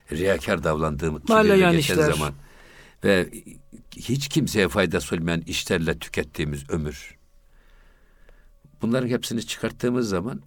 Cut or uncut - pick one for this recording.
cut